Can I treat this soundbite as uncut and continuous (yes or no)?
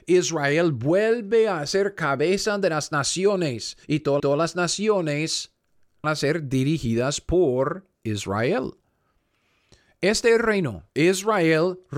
no